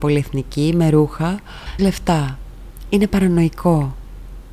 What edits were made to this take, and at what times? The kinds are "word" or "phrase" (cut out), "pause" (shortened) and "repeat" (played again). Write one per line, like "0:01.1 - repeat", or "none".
0:01.8 - phrase